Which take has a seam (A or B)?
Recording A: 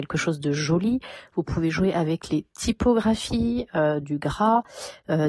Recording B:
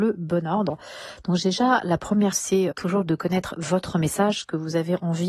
B